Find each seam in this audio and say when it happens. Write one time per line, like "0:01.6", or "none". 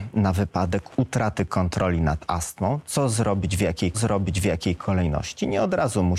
0:03.9